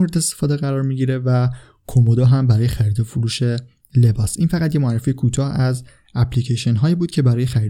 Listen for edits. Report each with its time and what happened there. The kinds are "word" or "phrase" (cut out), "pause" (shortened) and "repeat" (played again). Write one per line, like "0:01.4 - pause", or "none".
none